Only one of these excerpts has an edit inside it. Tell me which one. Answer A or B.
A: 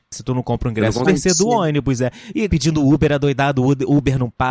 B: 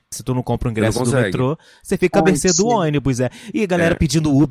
A